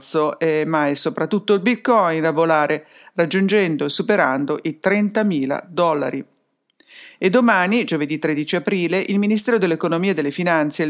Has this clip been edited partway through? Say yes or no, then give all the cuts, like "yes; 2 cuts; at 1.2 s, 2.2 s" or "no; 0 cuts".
no; 0 cuts